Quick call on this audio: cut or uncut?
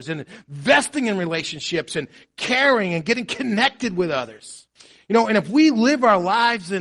uncut